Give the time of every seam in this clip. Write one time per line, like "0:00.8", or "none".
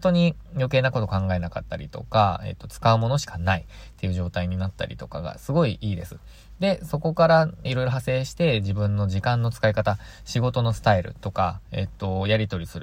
0:07.7